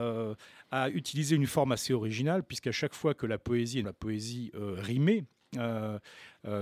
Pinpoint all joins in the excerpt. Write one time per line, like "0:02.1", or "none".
0:03.8

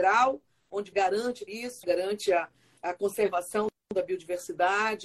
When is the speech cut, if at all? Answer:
0:00.9
0:01.5
0:01.8
0:02.8

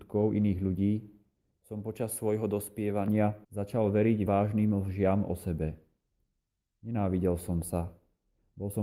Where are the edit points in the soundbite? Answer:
0:03.4
0:04.3

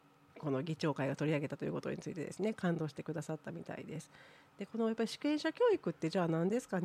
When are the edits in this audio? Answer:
none

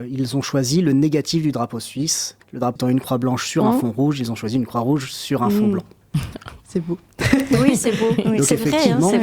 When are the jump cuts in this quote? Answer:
0:02.4
0:02.8

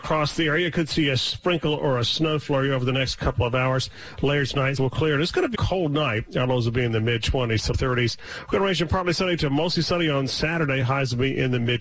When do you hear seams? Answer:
0:04.8
0:05.5
0:07.7

